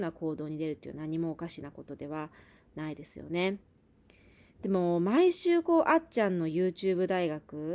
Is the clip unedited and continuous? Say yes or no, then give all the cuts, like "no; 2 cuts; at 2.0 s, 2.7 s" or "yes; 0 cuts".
yes; 0 cuts